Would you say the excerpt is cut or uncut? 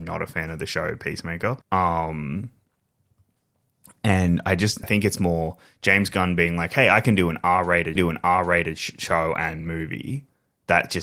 cut